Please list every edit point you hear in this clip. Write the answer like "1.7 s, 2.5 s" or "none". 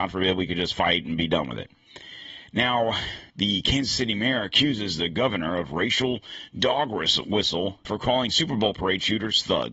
3.3 s, 7.8 s